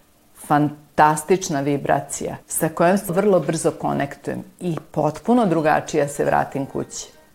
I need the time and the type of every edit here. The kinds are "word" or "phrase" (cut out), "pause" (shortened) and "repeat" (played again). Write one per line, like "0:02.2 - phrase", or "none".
0:02.4 - pause
0:03.1 - word